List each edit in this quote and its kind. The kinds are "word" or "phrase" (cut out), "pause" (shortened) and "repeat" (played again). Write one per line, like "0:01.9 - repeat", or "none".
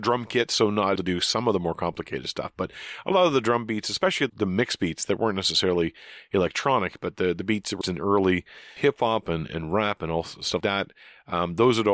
0:01.0 - word
0:04.3 - word
0:07.8 - word
0:08.8 - word
0:09.5 - word
0:10.6 - word